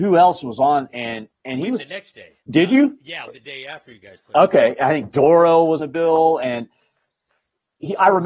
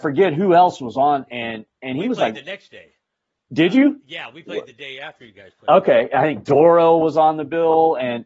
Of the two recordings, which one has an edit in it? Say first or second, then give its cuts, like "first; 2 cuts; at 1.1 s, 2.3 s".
first; 4 cuts; at 1.8 s, 2.4 s, 3.3 s, 5.8 s